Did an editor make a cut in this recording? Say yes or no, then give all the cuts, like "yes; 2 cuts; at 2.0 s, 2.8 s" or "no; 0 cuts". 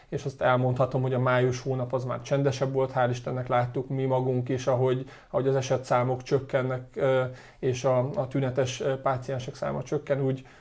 no; 0 cuts